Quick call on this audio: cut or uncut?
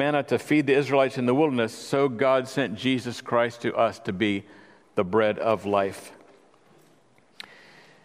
uncut